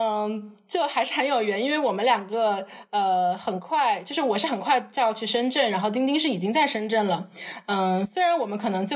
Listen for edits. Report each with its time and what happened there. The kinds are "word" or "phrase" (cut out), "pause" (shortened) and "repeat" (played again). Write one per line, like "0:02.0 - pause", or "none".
none